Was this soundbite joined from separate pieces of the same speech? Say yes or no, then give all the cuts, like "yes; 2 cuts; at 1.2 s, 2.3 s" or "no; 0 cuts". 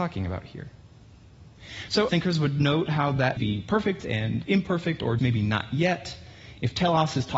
yes; 3 cuts; at 2.1 s, 3.4 s, 5.2 s